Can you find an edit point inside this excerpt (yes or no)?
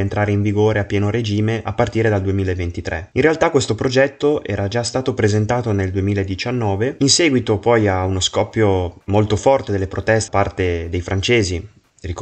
yes